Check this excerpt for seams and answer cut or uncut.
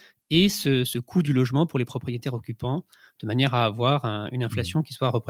uncut